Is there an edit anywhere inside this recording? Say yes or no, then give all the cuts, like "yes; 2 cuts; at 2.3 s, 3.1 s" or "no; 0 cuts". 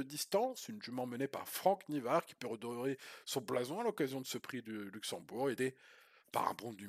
no; 0 cuts